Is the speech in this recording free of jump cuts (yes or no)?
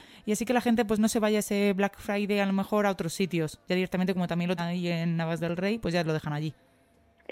no